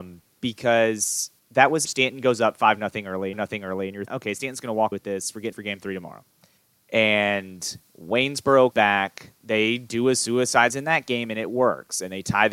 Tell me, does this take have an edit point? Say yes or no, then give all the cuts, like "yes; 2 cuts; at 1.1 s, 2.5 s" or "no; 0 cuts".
yes; 9 cuts; at 1.4 s, 1.8 s, 3.3 s, 4.1 s, 4.9 s, 5.5 s, 6.6 s, 8.7 s, 10.7 s